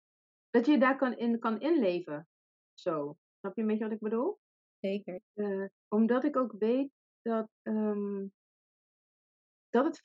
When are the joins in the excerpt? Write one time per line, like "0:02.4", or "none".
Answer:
0:05.2
0:07.5